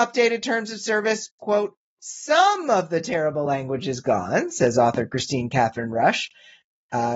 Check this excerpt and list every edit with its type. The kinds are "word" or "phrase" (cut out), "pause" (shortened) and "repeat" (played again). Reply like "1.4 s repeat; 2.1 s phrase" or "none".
none